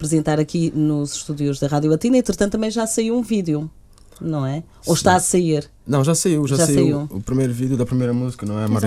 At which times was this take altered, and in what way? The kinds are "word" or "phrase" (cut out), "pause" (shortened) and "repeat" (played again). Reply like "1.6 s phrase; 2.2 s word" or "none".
none